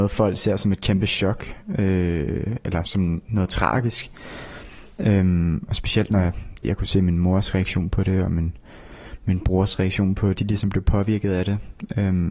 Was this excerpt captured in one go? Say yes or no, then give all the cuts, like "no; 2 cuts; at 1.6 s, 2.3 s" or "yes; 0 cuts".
no; 3 cuts; at 2.8 s, 6.6 s, 10.3 s